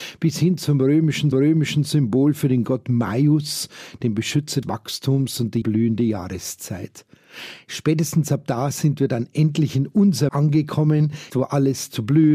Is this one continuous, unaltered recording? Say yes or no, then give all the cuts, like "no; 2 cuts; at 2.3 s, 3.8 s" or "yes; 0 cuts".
no; 5 cuts; at 1.3 s, 4.6 s, 5.6 s, 10.3 s, 11.3 s